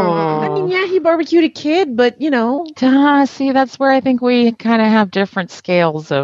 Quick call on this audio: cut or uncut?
uncut